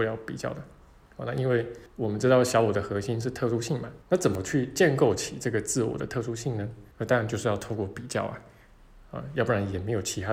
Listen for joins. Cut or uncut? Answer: cut